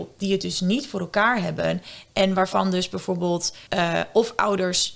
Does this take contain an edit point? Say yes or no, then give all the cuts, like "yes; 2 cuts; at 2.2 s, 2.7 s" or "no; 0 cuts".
yes; 1 cut; at 3.7 s